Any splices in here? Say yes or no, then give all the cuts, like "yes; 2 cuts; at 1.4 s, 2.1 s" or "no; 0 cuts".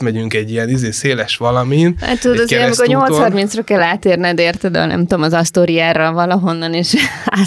no; 0 cuts